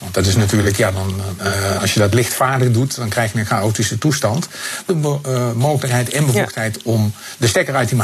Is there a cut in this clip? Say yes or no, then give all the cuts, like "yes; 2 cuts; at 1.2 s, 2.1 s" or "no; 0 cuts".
yes; 1 cut; at 4.9 s